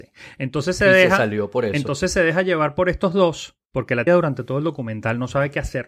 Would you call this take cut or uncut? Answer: cut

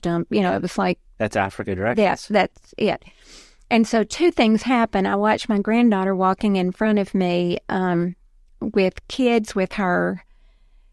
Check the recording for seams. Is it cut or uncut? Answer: uncut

